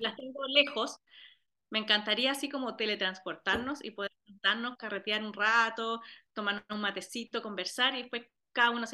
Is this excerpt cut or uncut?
uncut